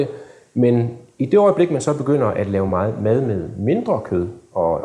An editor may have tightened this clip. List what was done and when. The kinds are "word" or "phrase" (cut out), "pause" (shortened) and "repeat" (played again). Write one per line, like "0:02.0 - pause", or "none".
none